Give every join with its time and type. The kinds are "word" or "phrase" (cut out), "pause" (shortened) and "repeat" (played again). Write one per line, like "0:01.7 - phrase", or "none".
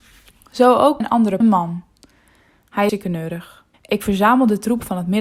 0:01.0 - word
0:01.4 - phrase
0:02.9 - word
0:03.7 - pause

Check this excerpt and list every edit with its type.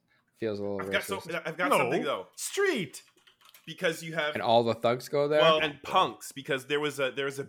0:03.6 - pause
0:05.6 - phrase

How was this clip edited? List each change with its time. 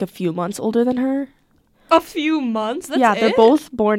none

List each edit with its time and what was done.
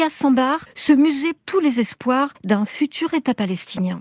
0:01.4 - word

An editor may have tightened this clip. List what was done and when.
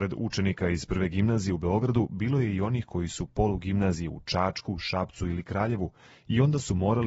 0:03.3 - word

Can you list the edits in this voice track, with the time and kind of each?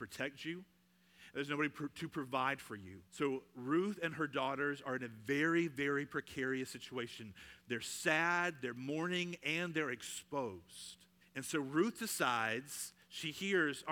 0:03.1 - pause
0:11.2 - pause

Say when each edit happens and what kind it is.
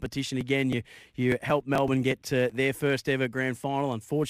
none

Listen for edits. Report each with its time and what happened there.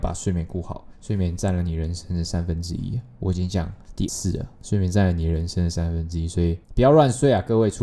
0:04.1 - word

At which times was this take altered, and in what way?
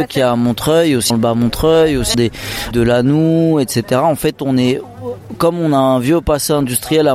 0:01.1 - word
0:02.1 - word
0:02.7 - word

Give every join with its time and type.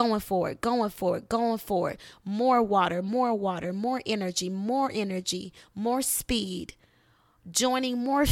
none

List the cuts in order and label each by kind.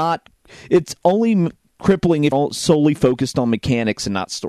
0:02.3 - word

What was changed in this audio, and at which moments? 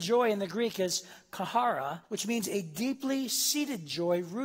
0:02.0 - pause

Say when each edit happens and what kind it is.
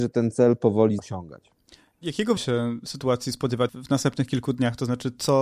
0:01.0 - word
0:02.4 - word
0:03.7 - word

